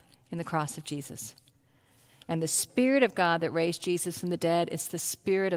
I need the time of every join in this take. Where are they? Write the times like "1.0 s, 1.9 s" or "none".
none